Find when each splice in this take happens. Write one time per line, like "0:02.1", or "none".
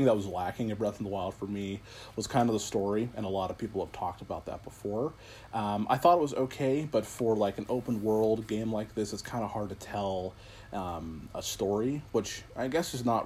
none